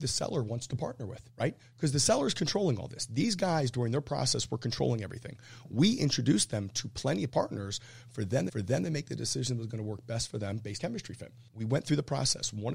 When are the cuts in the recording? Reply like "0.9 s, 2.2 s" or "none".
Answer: 1.3 s, 7.3 s, 8.5 s, 10.8 s, 11.5 s